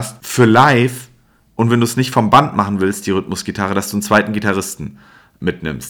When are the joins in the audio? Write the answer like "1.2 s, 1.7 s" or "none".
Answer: none

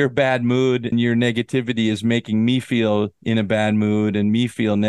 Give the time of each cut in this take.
0.9 s, 3.2 s

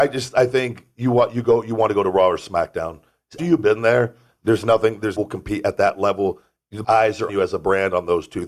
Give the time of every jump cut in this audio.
3.4 s, 5.2 s, 6.8 s, 7.3 s

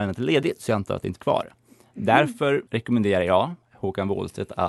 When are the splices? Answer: 1.2 s, 2.7 s, 3.6 s

